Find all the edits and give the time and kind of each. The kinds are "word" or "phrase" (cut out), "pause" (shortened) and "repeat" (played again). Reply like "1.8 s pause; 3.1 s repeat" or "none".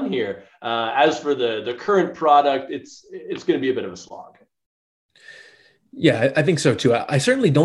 none